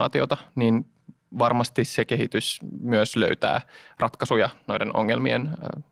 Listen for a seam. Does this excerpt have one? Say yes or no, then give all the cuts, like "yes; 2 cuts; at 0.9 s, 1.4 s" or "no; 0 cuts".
no; 0 cuts